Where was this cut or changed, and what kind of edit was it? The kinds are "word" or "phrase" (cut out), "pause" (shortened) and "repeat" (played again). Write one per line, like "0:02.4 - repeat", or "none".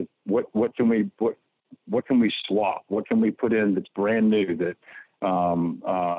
none